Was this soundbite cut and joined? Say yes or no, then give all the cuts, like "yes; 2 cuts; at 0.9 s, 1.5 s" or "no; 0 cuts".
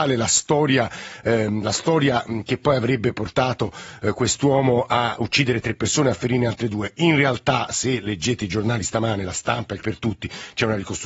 yes; 1 cut; at 9.8 s